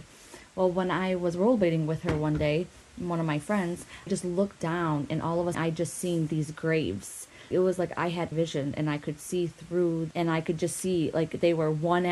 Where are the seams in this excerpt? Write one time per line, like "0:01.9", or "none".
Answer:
0:04.1
0:05.5
0:07.5
0:08.3
0:10.1